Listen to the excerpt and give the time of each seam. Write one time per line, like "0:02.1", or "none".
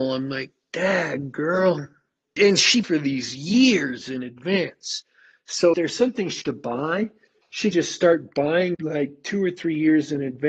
0:02.4
0:02.8
0:05.7
0:06.4
0:07.7
0:08.7